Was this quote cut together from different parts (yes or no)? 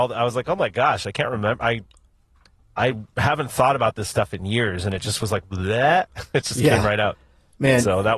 no